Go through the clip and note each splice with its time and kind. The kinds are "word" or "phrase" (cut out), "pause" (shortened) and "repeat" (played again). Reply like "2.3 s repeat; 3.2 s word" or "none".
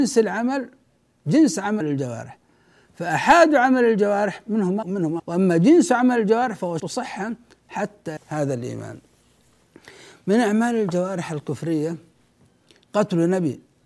1.8 s phrase; 4.8 s phrase; 5.2 s phrase; 6.8 s word; 8.2 s word